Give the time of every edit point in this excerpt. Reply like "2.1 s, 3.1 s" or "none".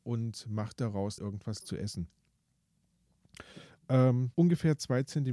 1.2 s, 1.6 s, 4.3 s